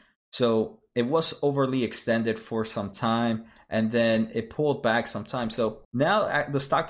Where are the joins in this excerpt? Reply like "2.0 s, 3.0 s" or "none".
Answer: 5.8 s